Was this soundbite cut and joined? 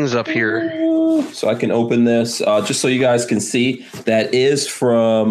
no; 0 cuts

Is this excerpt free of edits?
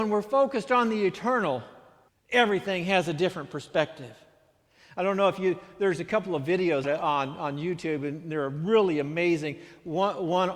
no; 2 cuts; at 2.1 s, 6.8 s

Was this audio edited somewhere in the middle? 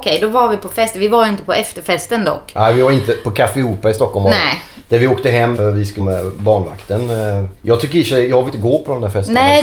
yes; 4 cuts; at 5.5 s, 6.0 s, 7.6 s, 8.5 s

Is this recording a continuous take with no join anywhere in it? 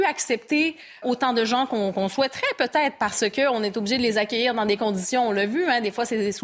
no; 1 cut; at 1.0 s

